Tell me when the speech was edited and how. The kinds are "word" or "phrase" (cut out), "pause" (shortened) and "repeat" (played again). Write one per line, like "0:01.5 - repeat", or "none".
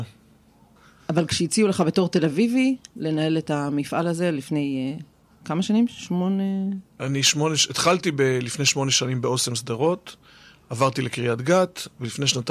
none